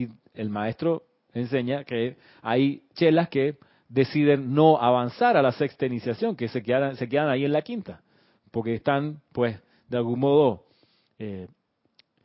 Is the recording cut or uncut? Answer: uncut